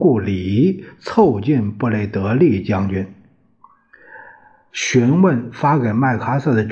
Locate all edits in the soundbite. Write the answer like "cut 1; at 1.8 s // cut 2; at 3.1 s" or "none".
none